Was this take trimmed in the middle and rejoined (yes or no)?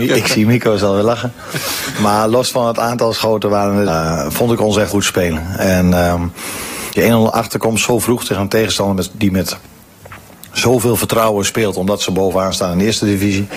yes